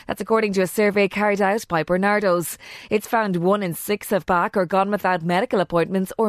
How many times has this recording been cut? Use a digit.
1